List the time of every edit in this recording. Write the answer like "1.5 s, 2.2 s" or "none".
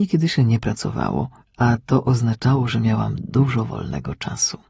1.4 s